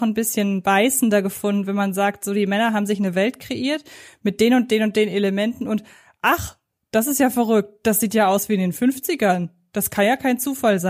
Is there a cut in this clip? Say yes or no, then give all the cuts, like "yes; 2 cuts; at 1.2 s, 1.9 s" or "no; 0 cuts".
no; 0 cuts